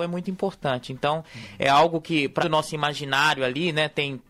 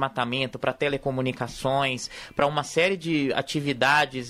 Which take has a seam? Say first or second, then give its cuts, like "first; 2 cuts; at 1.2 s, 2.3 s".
first; 1 cut; at 2.4 s